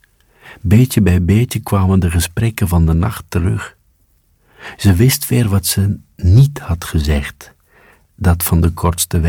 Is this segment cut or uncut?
uncut